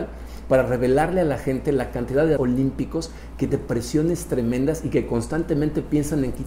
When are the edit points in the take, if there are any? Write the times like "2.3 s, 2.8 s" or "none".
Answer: 2.4 s, 3.5 s